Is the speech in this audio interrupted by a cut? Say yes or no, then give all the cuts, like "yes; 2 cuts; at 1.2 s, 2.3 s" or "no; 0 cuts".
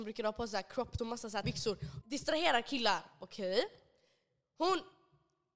yes; 3 cuts; at 1.0 s, 1.4 s, 2.0 s